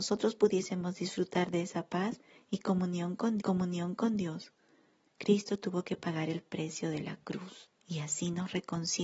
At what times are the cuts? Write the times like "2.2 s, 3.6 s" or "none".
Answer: 3.4 s, 7.7 s